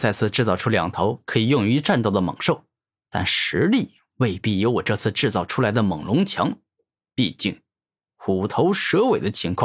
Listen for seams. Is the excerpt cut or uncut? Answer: uncut